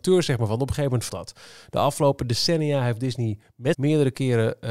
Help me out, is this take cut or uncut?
cut